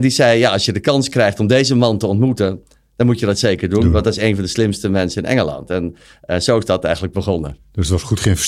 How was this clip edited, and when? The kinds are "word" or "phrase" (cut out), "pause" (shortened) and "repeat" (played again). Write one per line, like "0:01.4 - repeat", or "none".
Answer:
none